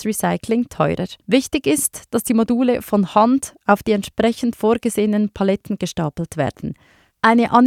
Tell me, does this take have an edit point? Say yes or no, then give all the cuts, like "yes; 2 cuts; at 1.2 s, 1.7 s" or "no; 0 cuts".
yes; 1 cut; at 1.2 s